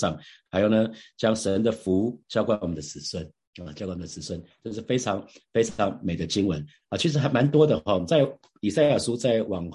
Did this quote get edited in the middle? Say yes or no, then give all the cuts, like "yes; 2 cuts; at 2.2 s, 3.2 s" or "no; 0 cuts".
no; 0 cuts